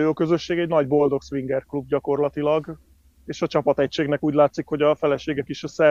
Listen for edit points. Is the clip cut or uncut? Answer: uncut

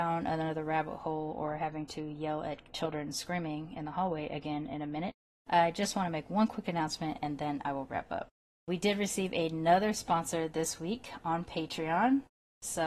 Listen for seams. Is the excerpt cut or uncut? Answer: uncut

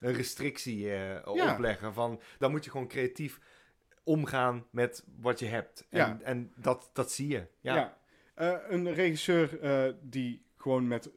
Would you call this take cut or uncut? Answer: uncut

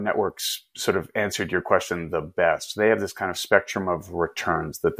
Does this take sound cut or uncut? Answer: uncut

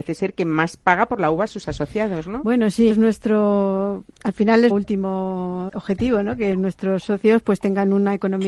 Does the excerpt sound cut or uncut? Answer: cut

